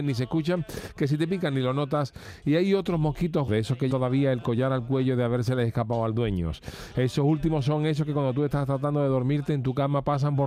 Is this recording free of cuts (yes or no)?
no